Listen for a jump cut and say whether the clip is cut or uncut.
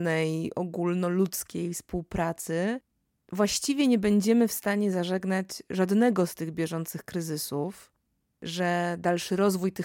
uncut